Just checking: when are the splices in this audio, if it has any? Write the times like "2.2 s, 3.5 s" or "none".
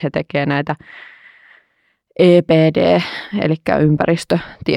none